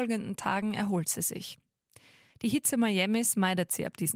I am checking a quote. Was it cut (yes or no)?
no